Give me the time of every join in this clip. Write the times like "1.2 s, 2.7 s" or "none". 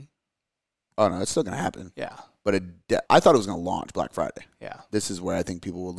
3.0 s, 5.0 s